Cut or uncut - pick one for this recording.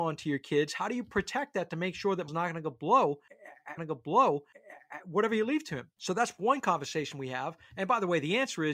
cut